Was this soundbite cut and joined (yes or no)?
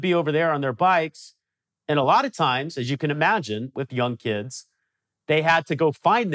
no